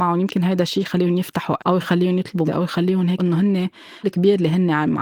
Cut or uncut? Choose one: cut